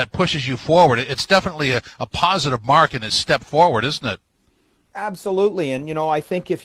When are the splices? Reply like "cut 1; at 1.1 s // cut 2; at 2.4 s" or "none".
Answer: none